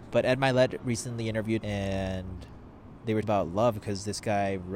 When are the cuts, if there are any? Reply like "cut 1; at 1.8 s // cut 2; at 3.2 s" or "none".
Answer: cut 1; at 1.6 s // cut 2; at 3.2 s